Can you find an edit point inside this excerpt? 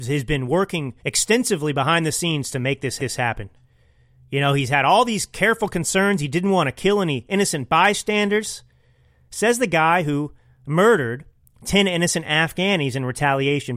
yes; 2 cuts; at 1.0 s, 3.0 s

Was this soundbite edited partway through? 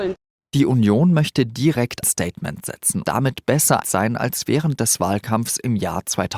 yes; 3 cuts; at 2.0 s, 3.0 s, 3.8 s

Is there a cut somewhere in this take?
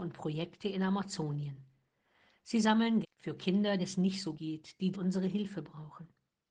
yes; 4 cuts; at 3.0 s, 3.8 s, 4.3 s, 4.9 s

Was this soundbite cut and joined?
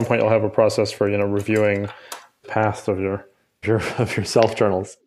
yes; 2 cuts; at 2.4 s, 3.6 s

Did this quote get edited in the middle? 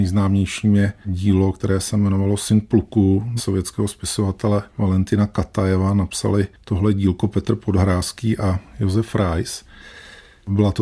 yes; 2 cuts; at 3.4 s, 4.7 s

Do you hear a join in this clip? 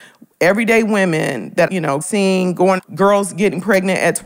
yes; 3 cuts; at 1.7 s, 2.0 s, 2.8 s

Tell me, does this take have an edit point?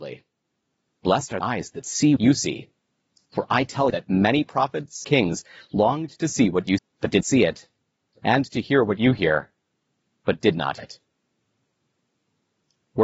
yes; 7 cuts; at 1.4 s, 2.2 s, 3.9 s, 5.0 s, 6.8 s, 7.2 s, 10.8 s

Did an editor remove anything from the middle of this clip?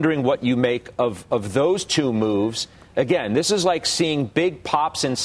no; 0 cuts

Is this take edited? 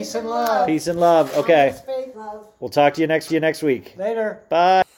yes; 2 cuts; at 2.1 s, 3.3 s

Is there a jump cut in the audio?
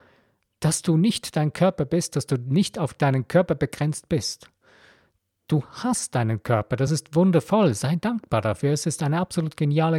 no; 0 cuts

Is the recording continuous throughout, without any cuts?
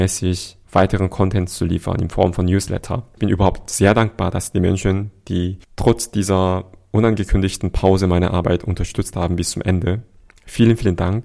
yes; 0 cuts

